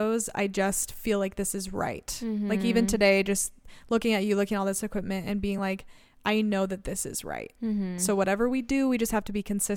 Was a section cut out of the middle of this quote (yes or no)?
no